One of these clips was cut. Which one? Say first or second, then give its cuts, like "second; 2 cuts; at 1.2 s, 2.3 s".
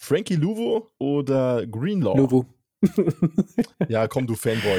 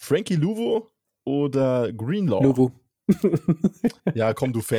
first; 1 cut; at 1.0 s